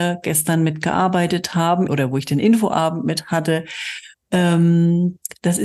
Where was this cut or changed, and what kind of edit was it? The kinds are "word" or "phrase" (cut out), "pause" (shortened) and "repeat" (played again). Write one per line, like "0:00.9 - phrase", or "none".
0:01.9 - word
0:04.1 - pause